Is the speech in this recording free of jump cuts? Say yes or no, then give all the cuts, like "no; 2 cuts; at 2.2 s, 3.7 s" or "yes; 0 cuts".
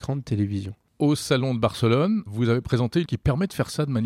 no; 2 cuts; at 2.3 s, 3.0 s